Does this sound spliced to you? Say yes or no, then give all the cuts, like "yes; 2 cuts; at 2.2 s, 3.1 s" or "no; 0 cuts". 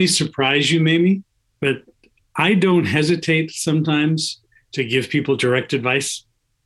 no; 0 cuts